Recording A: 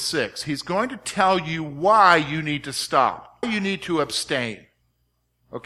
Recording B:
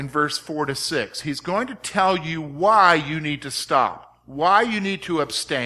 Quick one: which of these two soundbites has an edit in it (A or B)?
A